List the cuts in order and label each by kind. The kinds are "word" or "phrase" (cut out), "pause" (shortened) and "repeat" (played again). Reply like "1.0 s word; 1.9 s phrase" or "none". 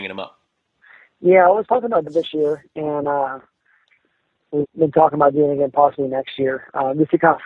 2.1 s word; 4.6 s word